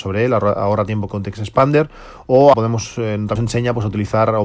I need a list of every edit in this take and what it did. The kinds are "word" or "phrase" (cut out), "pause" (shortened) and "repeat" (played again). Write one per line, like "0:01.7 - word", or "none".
0:01.1 - word
0:02.5 - word
0:03.4 - word